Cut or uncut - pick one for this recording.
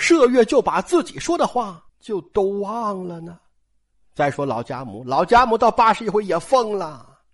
cut